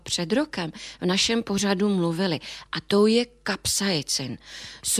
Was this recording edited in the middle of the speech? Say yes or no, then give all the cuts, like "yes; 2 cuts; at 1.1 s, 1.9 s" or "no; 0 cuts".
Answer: no; 0 cuts